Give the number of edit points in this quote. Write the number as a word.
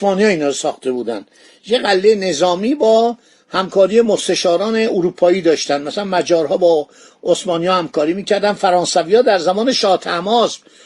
zero